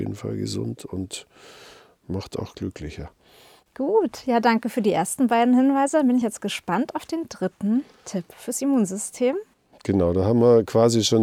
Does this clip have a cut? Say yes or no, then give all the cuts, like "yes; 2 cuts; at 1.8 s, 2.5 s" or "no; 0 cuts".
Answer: no; 0 cuts